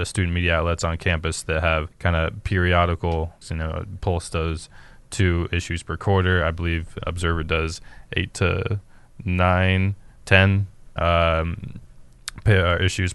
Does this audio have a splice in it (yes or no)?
yes